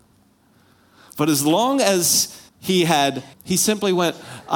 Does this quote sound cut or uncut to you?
cut